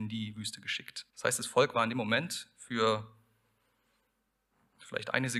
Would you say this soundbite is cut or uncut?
cut